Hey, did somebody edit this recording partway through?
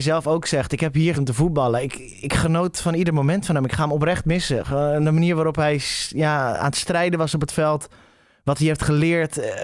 yes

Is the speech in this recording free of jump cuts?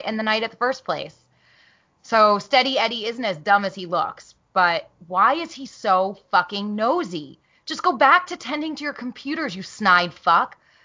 yes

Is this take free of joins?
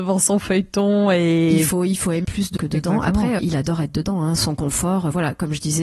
no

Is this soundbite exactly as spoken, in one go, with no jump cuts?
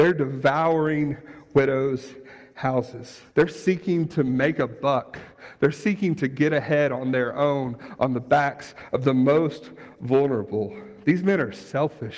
no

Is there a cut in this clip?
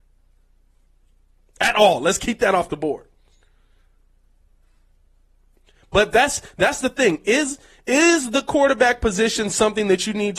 no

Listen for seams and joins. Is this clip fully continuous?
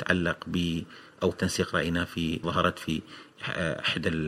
no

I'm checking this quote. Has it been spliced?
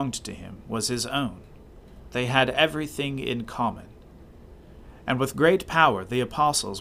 yes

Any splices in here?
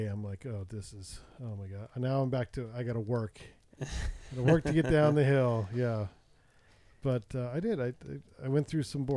no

